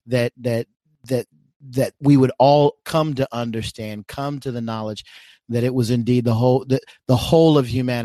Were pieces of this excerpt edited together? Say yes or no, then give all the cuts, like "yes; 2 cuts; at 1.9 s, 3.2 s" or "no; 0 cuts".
no; 0 cuts